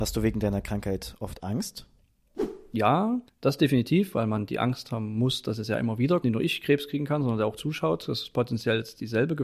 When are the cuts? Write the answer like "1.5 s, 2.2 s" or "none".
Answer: 3.3 s, 6.2 s, 7.6 s